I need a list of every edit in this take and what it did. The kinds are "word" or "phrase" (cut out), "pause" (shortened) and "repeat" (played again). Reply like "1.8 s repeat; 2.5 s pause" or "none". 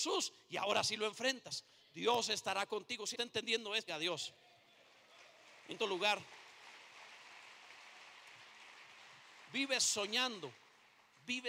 3.1 s word; 3.9 s word; 5.8 s word